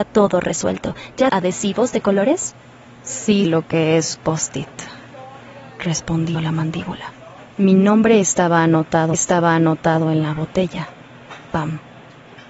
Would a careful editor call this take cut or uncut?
cut